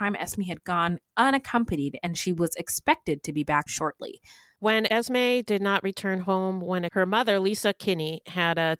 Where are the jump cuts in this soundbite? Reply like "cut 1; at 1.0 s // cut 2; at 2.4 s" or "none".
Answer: cut 1; at 3.7 s // cut 2; at 6.9 s